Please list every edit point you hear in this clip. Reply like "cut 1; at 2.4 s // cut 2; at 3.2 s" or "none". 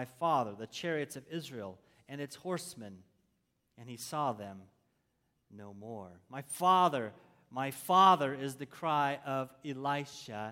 none